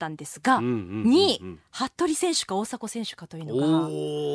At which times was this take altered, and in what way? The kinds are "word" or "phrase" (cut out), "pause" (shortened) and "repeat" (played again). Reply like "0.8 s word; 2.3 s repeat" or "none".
none